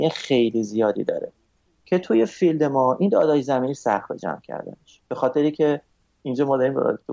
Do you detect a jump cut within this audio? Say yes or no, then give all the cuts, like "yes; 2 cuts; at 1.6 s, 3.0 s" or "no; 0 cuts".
no; 0 cuts